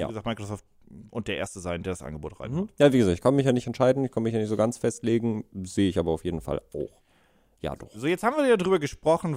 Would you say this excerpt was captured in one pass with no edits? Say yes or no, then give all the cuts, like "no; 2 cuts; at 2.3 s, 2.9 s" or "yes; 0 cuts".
no; 1 cut; at 1.1 s